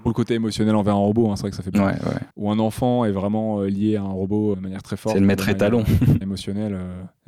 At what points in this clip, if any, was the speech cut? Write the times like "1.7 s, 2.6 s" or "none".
1.7 s, 2.3 s, 4.5 s, 6.2 s